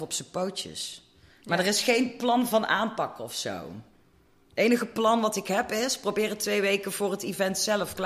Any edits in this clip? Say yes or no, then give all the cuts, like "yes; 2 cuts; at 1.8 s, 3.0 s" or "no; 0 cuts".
no; 0 cuts